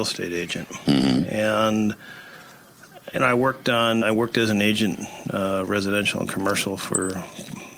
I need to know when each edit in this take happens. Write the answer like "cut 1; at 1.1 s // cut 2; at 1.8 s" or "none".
cut 1; at 4.0 s